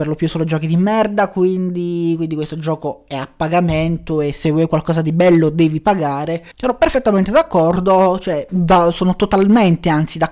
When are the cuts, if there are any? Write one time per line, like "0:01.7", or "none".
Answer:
0:06.5